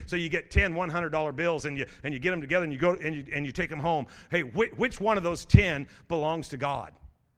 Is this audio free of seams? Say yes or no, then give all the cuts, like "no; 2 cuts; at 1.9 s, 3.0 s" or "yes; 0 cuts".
yes; 0 cuts